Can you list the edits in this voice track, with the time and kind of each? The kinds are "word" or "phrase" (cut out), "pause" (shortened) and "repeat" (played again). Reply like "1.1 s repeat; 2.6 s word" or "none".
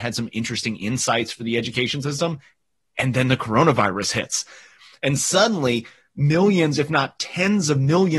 none